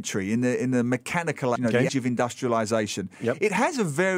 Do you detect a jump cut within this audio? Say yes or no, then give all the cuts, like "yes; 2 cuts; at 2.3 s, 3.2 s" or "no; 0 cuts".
yes; 2 cuts; at 1.6 s, 1.9 s